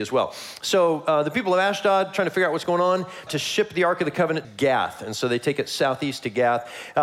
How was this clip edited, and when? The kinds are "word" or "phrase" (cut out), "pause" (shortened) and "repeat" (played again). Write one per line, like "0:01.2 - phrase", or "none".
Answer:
0:03.3 - word
0:04.4 - word